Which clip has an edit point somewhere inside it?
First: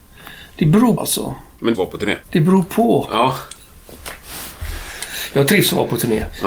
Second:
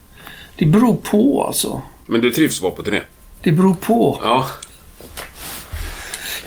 first; 3 cuts; at 1.0 s, 1.7 s, 2.2 s

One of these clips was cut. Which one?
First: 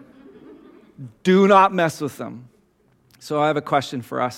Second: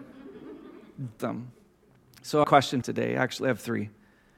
second; 3 cuts; at 1.2 s, 2.4 s, 2.8 s

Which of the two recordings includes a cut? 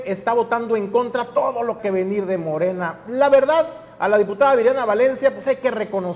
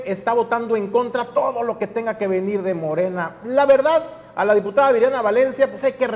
first; 1 cut; at 1.8 s

